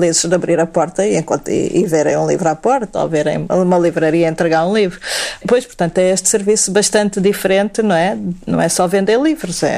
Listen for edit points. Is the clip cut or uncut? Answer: cut